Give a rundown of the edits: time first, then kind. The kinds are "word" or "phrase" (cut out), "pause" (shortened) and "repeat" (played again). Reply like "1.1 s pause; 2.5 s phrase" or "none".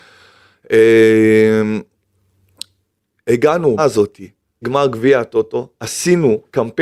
3.8 s word; 4.6 s word